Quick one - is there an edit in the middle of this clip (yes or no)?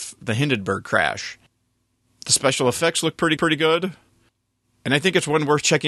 yes